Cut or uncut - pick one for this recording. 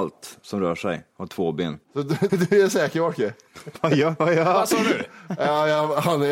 cut